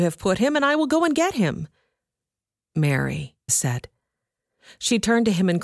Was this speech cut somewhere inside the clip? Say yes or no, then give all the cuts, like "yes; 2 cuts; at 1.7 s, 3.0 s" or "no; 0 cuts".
yes; 1 cut; at 3.5 s